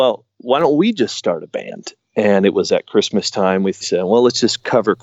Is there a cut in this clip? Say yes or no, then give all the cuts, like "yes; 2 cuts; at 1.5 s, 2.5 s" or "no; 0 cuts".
no; 0 cuts